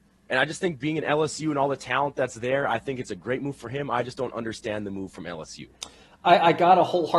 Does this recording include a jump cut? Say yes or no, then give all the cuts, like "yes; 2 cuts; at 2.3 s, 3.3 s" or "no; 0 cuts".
no; 0 cuts